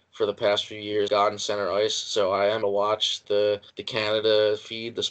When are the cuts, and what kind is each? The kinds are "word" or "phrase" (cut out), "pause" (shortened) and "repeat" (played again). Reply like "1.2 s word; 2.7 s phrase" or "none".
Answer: 1.1 s word; 2.6 s word; 3.2 s word; 3.7 s pause